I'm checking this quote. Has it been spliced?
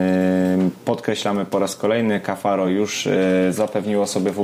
no; 0 cuts

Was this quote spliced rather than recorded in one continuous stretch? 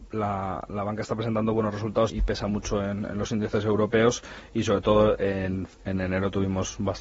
yes; 1 cut; at 2.1 s

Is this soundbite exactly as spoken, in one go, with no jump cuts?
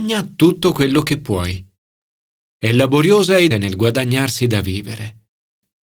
no; 1 cut; at 3.5 s

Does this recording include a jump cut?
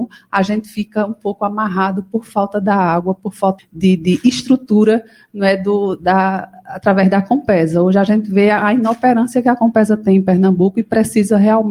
yes; 1 cut; at 3.6 s

